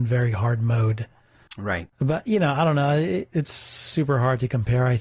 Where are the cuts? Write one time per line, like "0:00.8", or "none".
0:01.9